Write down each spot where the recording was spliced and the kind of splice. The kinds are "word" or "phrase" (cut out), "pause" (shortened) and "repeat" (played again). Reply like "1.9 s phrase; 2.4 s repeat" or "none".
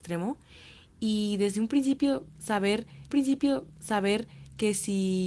3.1 s repeat